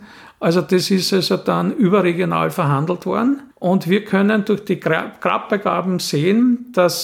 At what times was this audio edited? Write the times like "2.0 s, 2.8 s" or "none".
3.5 s

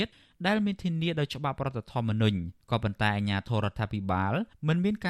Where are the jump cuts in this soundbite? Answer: 2.6 s

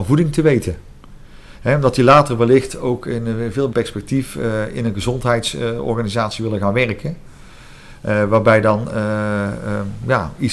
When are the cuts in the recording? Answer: 3.7 s

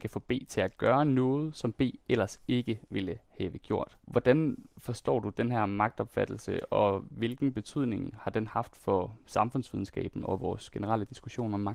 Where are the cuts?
4.0 s

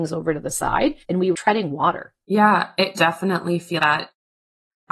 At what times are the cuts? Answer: 1.0 s, 1.3 s, 2.9 s, 3.8 s

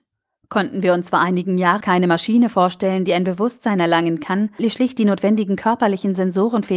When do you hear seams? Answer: 1.8 s, 4.6 s

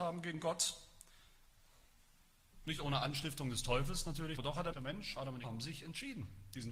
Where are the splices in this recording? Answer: 4.4 s, 4.7 s, 5.4 s

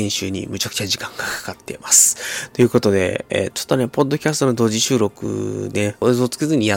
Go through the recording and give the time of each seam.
3.5 s

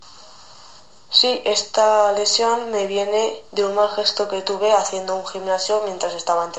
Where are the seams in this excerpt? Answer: 3.5 s

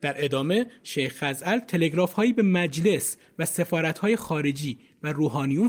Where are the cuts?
none

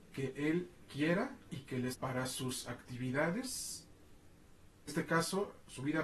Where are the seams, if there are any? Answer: 1.5 s, 1.9 s, 4.9 s

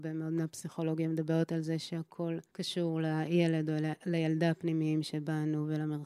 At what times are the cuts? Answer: 2.5 s

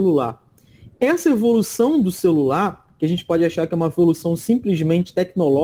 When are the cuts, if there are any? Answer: none

